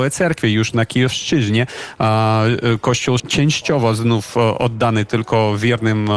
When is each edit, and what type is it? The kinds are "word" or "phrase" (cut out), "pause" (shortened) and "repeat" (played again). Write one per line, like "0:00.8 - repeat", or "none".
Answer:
0:03.2 - phrase